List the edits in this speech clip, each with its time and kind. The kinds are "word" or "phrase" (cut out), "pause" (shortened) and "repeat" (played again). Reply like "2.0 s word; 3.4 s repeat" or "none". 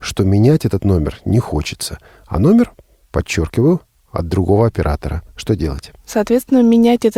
none